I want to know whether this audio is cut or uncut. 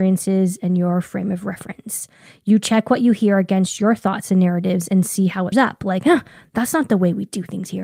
cut